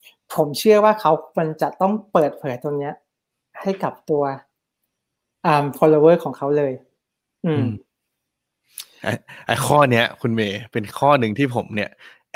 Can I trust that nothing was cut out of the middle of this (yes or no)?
yes